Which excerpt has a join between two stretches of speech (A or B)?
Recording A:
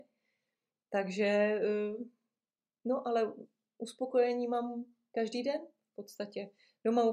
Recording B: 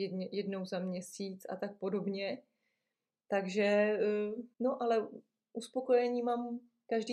B